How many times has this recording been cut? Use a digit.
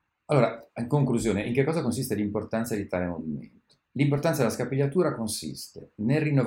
1